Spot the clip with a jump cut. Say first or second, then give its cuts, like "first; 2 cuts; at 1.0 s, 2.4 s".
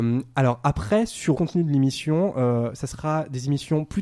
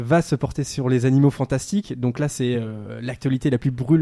first; 1 cut; at 1.3 s